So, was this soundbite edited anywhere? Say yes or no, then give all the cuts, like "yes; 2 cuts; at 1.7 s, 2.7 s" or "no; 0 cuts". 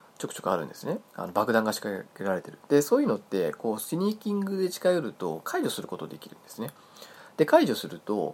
yes; 1 cut; at 1.1 s